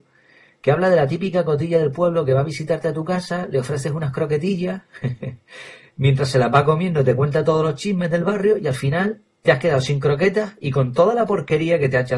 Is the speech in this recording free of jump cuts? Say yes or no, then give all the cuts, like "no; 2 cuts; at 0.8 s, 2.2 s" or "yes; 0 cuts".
yes; 0 cuts